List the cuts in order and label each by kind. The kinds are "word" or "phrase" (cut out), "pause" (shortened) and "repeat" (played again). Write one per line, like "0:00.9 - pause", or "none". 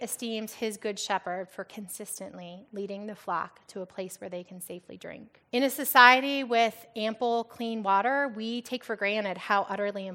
0:05.5 - pause